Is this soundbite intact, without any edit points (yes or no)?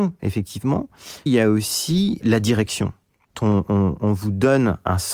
no